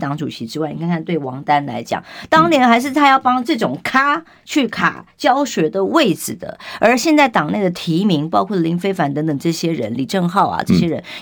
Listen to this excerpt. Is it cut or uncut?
uncut